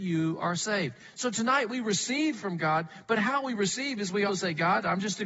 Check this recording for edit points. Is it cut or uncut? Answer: cut